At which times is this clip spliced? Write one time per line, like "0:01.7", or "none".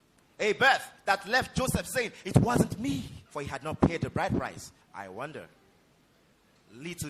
0:03.3
0:04.8